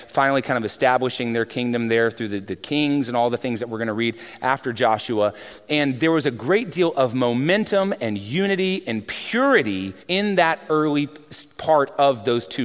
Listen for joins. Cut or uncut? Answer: cut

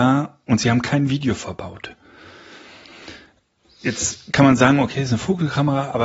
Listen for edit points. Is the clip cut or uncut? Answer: uncut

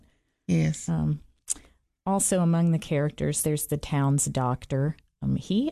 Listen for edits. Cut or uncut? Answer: uncut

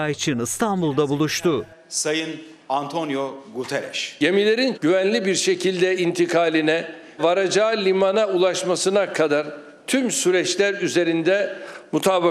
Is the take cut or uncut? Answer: cut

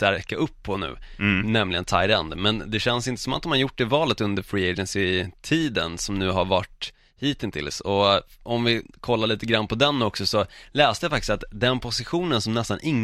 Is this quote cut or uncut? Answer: uncut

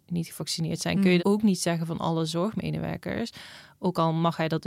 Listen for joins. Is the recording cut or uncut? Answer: cut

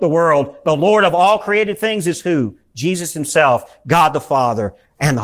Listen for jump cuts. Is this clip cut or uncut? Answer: uncut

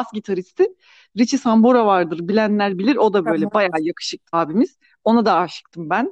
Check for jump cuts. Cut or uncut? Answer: cut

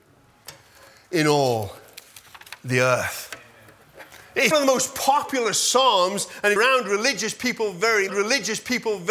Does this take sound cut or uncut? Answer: cut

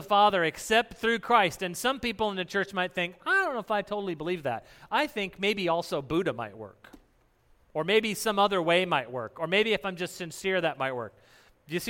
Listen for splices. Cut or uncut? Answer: uncut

